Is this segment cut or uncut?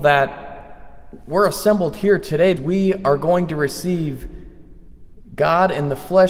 cut